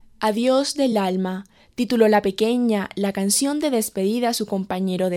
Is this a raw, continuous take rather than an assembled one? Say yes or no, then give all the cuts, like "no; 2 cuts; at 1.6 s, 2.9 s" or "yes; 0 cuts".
yes; 0 cuts